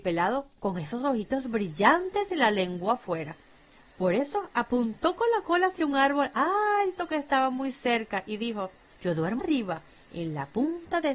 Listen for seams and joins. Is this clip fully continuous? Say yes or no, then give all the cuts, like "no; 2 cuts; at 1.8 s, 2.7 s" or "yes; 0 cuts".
no; 2 cuts; at 8.9 s, 9.4 s